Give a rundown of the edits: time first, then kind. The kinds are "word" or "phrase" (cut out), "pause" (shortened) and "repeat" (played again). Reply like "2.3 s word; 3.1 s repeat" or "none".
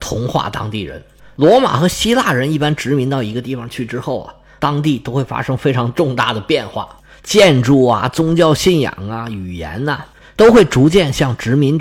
none